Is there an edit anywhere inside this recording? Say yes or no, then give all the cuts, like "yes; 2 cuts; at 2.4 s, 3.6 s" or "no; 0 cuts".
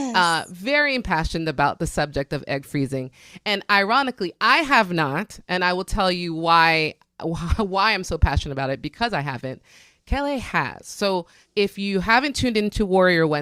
no; 0 cuts